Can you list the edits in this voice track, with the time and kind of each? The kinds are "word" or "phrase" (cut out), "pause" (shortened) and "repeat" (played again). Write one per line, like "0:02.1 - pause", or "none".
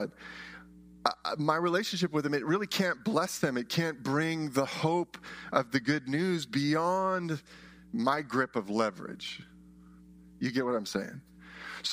none

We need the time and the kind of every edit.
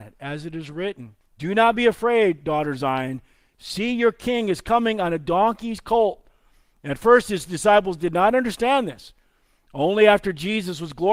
0:01.2 - pause

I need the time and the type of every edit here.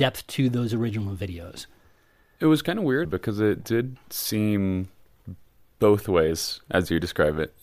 0:03.0 - word

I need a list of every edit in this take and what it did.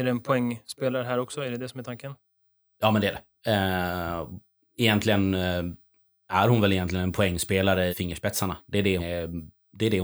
0:07.9 - word
0:09.0 - word

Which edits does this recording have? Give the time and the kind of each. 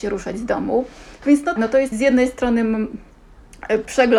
0:01.6 - word
0:01.9 - word

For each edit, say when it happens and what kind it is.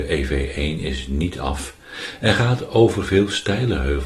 none

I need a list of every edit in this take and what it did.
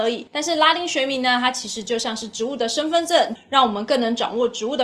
0:03.4 - phrase

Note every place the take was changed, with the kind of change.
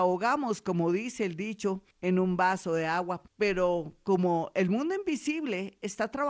0:01.9 - pause
0:03.3 - pause

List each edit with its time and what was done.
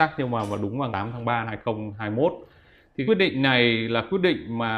0:00.9 - word
0:01.4 - word
0:03.1 - word

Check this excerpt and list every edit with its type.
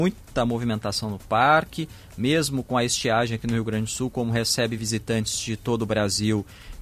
none

